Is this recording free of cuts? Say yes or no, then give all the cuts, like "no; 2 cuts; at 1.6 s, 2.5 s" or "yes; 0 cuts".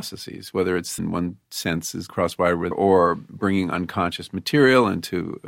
no; 3 cuts; at 1.0 s, 2.1 s, 2.7 s